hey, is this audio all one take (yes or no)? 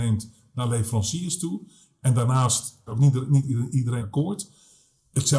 no